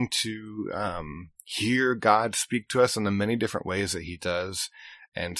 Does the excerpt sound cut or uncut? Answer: uncut